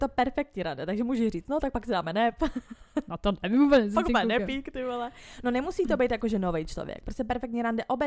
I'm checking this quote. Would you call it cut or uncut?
uncut